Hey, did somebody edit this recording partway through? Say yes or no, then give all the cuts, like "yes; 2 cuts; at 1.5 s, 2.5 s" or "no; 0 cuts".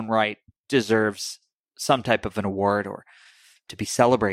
no; 0 cuts